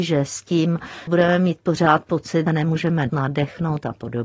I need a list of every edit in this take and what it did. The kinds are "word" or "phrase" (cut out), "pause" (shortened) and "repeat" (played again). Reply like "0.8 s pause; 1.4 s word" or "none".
1.1 s word; 2.5 s phrase; 3.1 s word